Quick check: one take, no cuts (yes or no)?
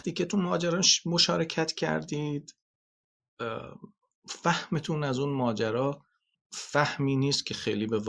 yes